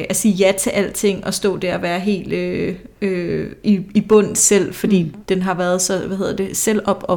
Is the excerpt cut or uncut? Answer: cut